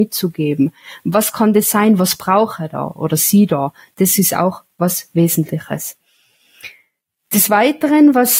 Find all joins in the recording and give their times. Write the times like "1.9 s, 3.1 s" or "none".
none